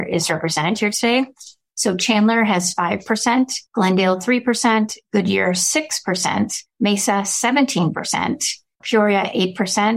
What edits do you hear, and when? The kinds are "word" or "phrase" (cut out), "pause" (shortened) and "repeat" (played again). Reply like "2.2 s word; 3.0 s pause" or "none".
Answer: 3.7 s pause